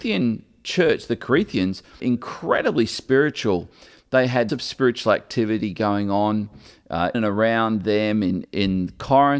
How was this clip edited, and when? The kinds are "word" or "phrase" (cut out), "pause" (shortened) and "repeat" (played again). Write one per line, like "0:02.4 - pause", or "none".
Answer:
0:02.0 - word
0:04.5 - word
0:07.1 - word
0:08.4 - word

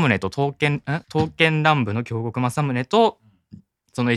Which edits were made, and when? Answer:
0:01.0 - pause

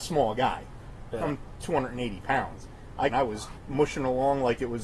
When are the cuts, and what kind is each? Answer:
0:03.1 - phrase
0:03.6 - word

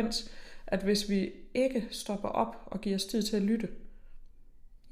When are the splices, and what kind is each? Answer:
none

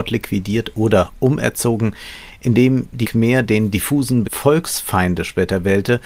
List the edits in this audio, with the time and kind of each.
0:03.0 - word
0:04.2 - word

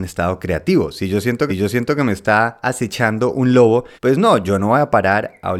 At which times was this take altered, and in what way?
0:01.5 - repeat
0:03.9 - pause

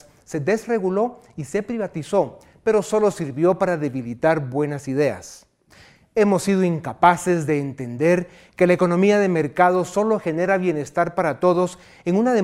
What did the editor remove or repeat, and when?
none

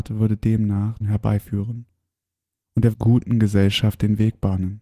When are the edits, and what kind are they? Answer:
0:01.0 - phrase
0:02.9 - word

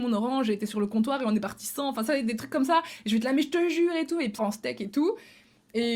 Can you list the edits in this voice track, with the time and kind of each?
0:04.4 - word

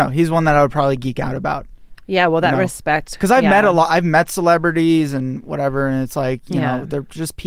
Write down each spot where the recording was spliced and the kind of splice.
none

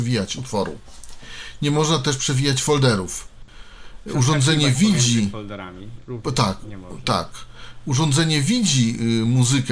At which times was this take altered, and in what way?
none

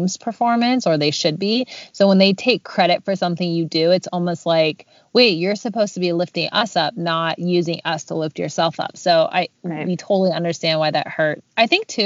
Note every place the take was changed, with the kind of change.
none

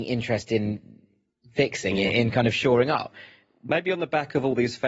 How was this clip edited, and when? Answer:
none

